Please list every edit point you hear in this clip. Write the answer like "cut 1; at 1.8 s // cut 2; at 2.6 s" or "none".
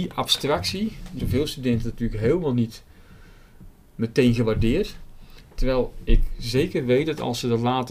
cut 1; at 1.2 s